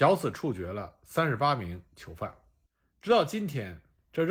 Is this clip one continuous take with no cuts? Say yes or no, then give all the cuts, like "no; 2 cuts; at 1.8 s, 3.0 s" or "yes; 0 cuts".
yes; 0 cuts